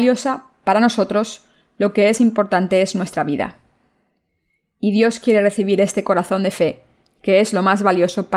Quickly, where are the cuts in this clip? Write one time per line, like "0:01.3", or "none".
0:02.2